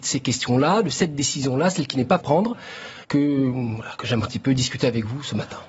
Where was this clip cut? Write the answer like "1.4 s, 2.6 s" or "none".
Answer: 2.2 s, 3.0 s, 4.3 s